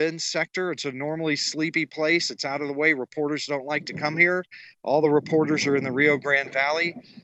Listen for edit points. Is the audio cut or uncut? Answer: uncut